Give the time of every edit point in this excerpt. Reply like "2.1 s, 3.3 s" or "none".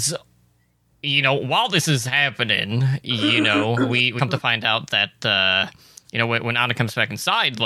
4.2 s